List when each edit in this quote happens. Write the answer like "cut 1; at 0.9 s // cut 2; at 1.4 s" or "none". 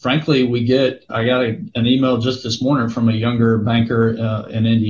cut 1; at 1.1 s